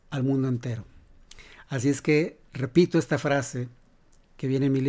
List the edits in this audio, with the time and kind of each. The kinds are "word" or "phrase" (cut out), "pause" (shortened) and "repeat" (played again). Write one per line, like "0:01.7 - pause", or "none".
0:02.5 - pause